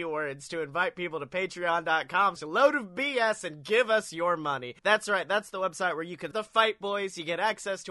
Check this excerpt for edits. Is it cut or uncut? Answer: cut